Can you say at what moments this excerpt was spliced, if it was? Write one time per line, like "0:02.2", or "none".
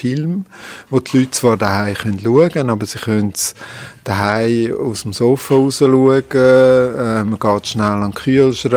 none